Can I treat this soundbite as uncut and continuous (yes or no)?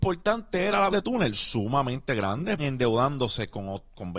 no